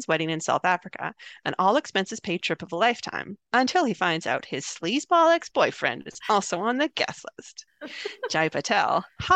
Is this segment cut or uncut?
cut